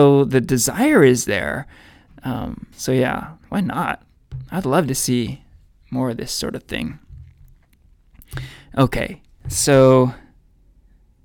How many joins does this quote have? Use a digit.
2